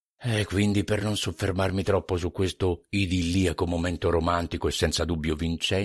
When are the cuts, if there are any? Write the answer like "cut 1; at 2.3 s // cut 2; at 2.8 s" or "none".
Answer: none